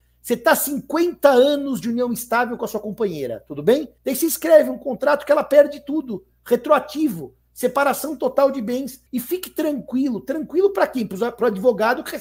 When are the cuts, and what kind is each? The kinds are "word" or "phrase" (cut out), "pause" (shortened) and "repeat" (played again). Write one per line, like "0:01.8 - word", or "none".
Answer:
0:04.0 - pause
0:09.1 - pause